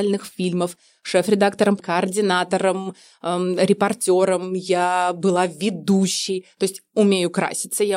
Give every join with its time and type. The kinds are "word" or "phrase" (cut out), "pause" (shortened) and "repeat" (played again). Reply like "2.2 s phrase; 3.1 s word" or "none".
1.8 s word; 6.9 s word